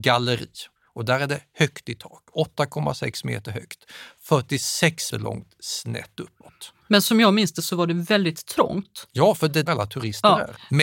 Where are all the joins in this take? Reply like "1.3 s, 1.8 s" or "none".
5.1 s, 9.7 s